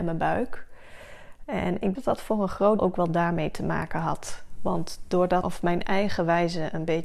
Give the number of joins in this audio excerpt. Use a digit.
3